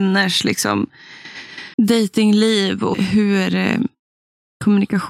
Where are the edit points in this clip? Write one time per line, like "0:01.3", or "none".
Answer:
0:01.7
0:02.9